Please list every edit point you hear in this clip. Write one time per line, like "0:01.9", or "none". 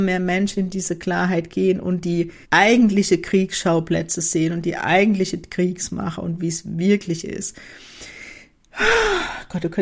0:02.4